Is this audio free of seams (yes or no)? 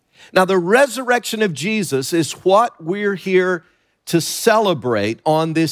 yes